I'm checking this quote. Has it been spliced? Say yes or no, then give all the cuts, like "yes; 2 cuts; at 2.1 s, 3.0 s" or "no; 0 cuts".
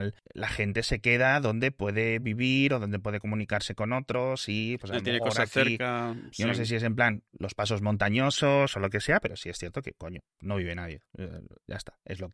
no; 0 cuts